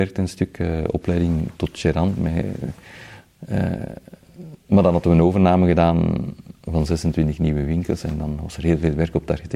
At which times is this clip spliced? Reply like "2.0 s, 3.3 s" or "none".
4.6 s